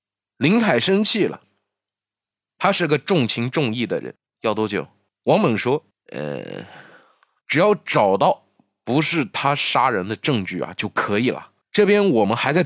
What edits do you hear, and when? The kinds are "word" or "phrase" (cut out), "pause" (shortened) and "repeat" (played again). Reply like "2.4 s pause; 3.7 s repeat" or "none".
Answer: none